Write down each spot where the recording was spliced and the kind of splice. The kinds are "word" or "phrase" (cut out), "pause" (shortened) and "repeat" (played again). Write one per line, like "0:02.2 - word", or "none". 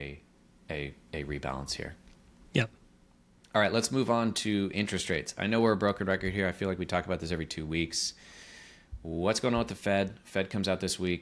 none